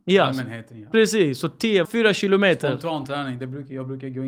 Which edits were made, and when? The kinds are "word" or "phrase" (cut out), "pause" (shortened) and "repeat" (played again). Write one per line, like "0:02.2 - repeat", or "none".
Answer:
0:01.8 - word